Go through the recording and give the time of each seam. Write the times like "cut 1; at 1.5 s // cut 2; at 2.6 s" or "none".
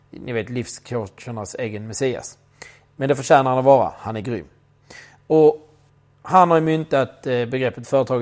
none